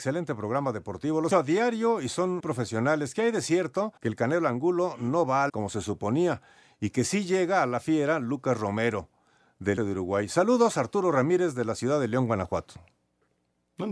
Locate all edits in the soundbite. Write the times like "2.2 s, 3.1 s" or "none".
1.3 s, 2.4 s, 4.0 s, 5.5 s, 9.8 s